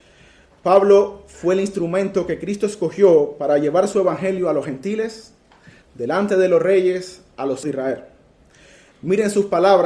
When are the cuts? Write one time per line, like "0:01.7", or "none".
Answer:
0:05.8
0:07.6

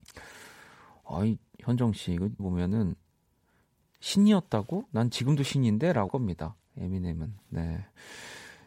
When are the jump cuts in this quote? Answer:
0:02.4
0:06.1

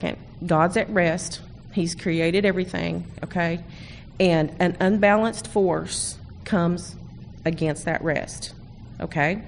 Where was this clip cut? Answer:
none

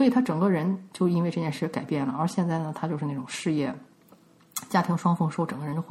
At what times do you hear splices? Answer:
none

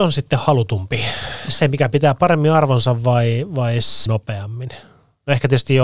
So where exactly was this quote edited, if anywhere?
0:04.1

